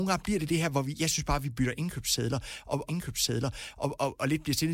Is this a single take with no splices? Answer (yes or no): no